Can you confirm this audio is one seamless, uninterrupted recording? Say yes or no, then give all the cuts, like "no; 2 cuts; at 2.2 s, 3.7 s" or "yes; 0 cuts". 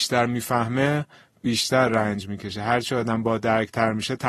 yes; 0 cuts